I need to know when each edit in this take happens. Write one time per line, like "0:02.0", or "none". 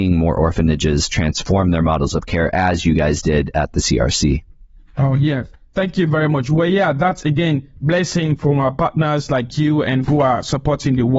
none